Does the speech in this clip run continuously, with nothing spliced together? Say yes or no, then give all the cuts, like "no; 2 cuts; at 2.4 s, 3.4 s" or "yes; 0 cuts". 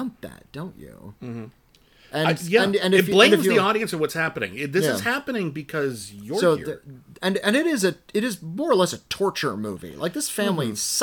yes; 0 cuts